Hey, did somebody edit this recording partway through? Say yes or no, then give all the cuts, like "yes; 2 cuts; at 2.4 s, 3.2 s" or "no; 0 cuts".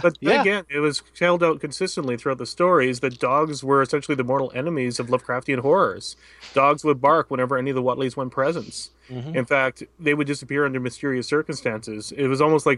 no; 0 cuts